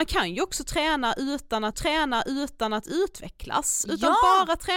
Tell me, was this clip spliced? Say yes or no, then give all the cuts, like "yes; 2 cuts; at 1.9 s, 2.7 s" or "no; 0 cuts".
yes; 1 cut; at 1.7 s